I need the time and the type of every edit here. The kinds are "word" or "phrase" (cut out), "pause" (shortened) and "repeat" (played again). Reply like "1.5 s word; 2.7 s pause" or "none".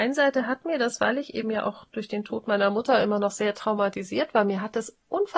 none